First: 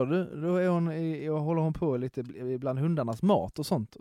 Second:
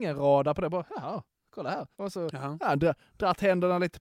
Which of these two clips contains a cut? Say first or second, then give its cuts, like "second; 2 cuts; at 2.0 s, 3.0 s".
second; 1 cut; at 1.9 s